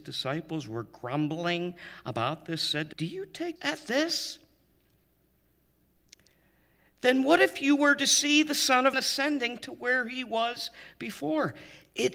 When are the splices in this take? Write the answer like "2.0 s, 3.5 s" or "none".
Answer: 2.9 s, 3.6 s, 8.9 s